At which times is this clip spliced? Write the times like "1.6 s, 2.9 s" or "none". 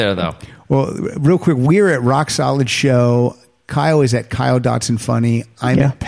none